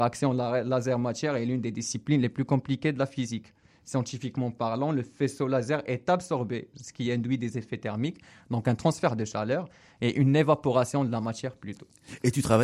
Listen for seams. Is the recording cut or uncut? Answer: uncut